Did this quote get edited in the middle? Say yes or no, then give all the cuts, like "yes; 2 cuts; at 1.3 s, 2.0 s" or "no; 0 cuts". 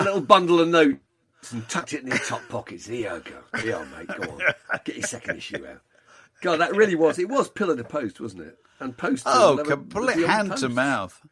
no; 0 cuts